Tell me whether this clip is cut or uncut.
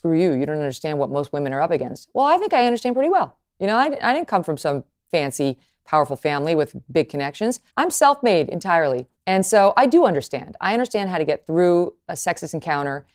cut